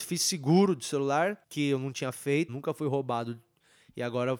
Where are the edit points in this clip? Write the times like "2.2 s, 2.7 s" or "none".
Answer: 1.4 s, 2.5 s